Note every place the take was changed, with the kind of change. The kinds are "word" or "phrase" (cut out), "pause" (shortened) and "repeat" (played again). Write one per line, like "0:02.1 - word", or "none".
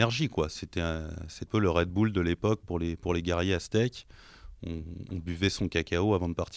0:01.5 - word